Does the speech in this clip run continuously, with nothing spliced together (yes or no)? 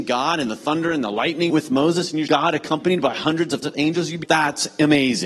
no